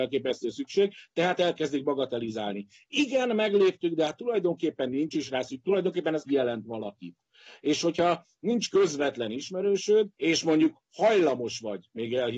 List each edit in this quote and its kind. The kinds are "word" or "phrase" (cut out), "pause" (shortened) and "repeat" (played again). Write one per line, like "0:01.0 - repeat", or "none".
0:06.3 - word
0:10.1 - pause